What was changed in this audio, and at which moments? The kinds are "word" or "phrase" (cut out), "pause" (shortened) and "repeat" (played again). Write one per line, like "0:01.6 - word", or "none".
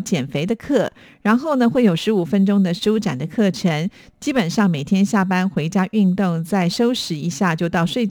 none